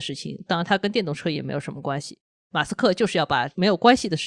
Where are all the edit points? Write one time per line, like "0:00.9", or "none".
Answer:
none